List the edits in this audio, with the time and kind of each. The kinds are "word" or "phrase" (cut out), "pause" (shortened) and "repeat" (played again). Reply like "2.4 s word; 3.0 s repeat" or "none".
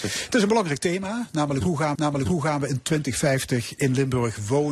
1.9 s repeat